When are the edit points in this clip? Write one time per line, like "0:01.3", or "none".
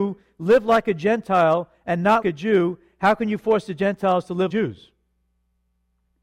0:02.2
0:04.5